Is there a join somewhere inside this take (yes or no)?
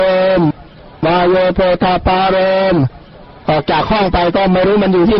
yes